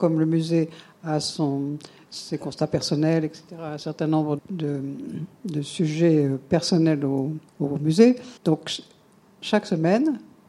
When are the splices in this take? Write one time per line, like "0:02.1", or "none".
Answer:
0:04.4
0:07.5
0:08.4